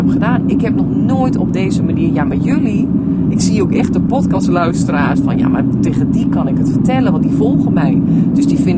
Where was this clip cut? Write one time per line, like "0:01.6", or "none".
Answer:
none